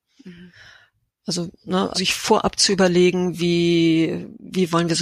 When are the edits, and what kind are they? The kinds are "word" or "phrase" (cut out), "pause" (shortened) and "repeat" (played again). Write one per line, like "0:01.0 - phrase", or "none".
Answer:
0:01.9 - word